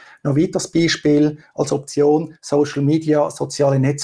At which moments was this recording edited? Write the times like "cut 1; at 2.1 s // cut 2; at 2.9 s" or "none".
none